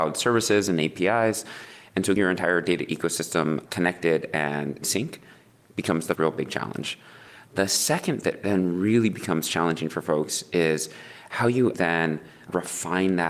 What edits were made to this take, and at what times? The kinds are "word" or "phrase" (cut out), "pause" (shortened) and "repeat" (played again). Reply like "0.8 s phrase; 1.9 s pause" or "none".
2.2 s word; 4.8 s word; 6.1 s word; 8.2 s word; 11.7 s word